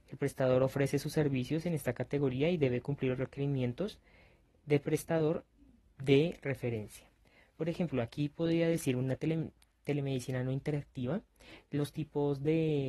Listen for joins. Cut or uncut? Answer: uncut